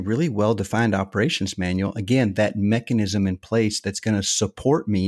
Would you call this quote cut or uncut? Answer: uncut